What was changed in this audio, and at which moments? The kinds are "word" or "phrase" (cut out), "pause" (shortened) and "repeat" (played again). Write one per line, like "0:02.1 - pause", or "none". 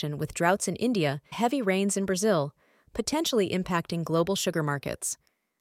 0:01.3 - word